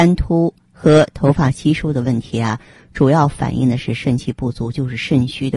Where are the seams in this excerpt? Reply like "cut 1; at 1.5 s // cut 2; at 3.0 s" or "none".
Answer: none

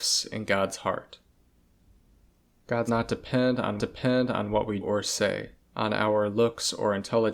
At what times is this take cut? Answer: cut 1; at 2.9 s // cut 2; at 3.8 s // cut 3; at 4.8 s // cut 4; at 5.6 s

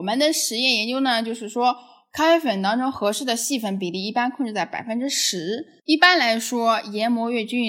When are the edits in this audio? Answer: cut 1; at 5.8 s

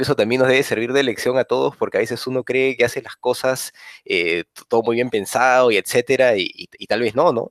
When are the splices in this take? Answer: none

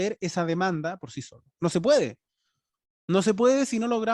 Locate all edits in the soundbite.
none

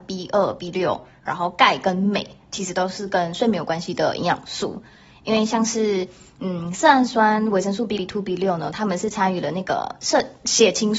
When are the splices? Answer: cut 1; at 8.0 s

